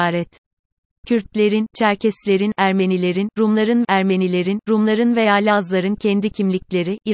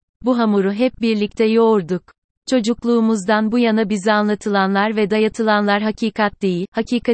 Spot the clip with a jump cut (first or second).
first